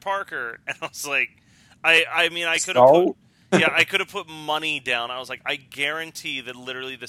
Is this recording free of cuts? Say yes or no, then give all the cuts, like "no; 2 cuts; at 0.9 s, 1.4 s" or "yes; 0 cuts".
yes; 0 cuts